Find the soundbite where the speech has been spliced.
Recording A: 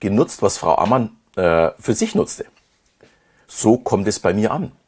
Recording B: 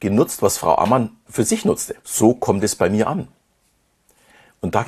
B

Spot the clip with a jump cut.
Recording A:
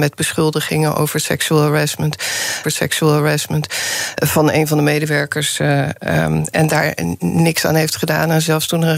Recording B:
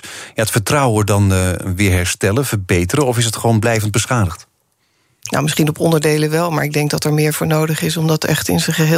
A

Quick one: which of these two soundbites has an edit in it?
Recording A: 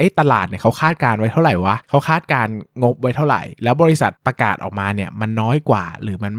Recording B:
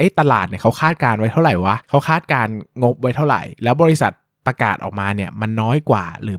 A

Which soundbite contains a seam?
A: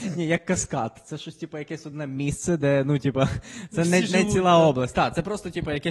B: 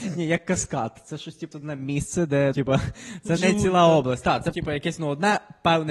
B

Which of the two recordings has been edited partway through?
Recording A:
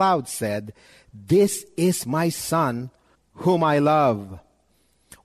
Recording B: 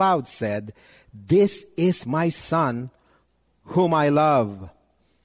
A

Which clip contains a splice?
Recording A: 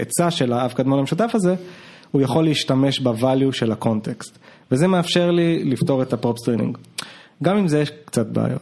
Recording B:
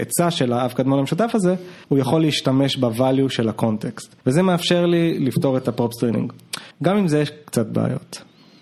B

